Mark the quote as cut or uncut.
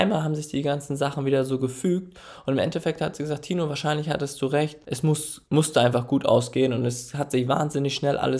cut